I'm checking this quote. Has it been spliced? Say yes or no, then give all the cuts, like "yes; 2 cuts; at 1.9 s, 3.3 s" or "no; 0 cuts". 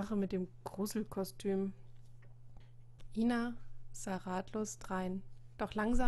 no; 0 cuts